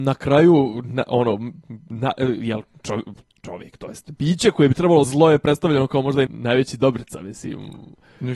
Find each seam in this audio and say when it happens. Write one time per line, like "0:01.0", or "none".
0:05.0
0:06.3